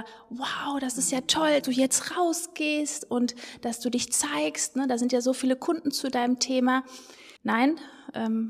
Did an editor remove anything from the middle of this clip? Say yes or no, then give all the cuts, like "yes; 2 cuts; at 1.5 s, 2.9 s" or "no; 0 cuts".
yes; 2 cuts; at 1.6 s, 7.4 s